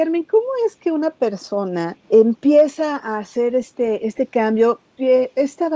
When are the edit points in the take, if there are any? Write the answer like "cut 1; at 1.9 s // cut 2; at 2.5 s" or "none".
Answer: cut 1; at 2.0 s